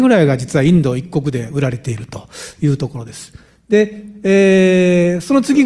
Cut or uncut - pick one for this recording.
uncut